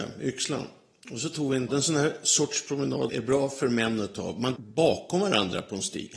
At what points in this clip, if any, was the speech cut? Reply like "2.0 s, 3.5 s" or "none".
1.7 s, 3.1 s, 4.6 s